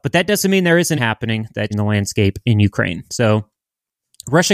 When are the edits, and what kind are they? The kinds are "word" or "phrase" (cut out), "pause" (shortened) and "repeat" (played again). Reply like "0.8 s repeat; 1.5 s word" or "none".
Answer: 1.0 s word; 1.7 s word; 3.1 s pause